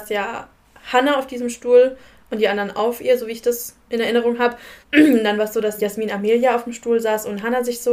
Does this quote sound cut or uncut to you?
cut